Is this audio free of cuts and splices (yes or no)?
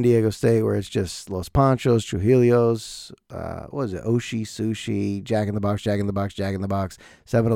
yes